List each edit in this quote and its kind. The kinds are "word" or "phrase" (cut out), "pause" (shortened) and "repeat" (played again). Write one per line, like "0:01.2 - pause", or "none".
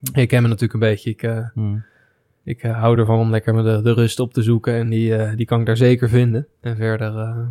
none